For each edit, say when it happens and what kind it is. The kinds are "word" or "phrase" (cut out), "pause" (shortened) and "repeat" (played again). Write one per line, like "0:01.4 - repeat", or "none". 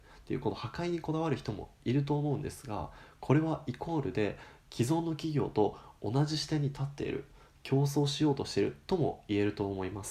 none